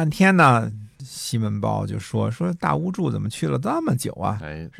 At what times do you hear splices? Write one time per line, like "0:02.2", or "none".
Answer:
0:00.9